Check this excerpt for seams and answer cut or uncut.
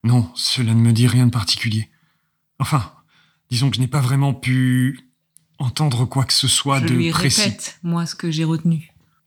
uncut